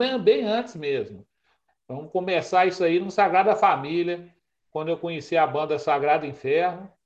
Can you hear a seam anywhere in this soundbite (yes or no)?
no